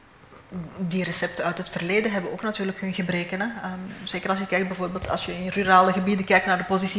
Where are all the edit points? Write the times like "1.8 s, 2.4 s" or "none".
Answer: none